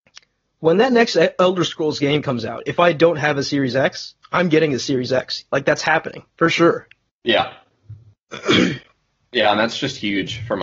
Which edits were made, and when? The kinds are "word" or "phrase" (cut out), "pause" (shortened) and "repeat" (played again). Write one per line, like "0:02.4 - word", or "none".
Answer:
0:05.5 - pause
0:06.3 - pause
0:07.1 - pause